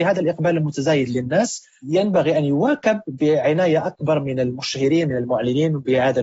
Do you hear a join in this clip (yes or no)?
no